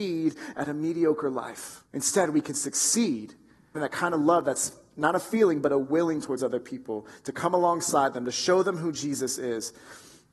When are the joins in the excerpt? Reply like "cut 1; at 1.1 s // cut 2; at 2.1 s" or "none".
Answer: cut 1; at 1.9 s // cut 2; at 3.8 s